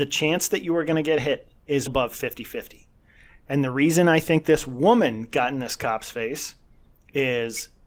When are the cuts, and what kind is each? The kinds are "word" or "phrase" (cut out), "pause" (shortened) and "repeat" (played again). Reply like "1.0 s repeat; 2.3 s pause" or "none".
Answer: 1.9 s word